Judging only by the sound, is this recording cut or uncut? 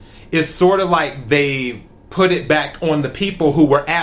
uncut